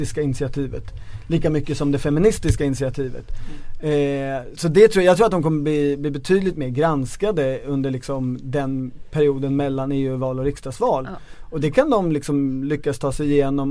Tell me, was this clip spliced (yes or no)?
yes